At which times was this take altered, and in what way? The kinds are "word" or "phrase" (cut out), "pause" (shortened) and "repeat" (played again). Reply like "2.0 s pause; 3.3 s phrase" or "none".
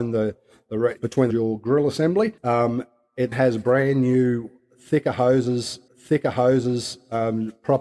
1.0 s word; 1.3 s phrase; 2.4 s pause; 3.3 s word; 5.9 s repeat